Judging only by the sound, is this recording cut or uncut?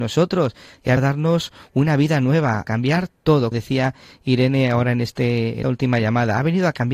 cut